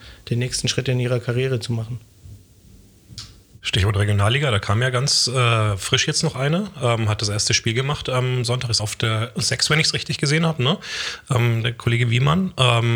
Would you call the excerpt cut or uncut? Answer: cut